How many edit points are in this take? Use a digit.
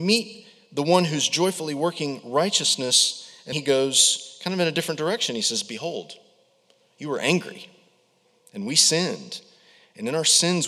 1